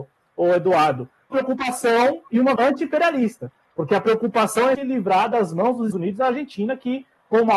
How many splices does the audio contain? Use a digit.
4